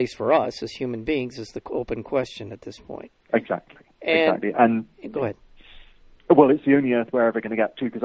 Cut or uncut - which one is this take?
uncut